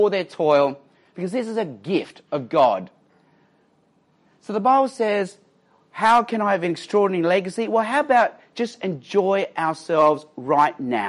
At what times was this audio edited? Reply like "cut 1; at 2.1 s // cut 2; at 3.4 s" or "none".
none